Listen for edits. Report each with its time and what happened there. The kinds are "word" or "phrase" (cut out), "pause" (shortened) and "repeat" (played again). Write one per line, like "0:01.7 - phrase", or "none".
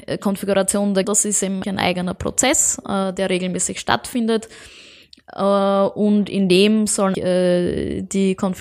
0:01.0 - word
0:01.6 - word
0:07.1 - word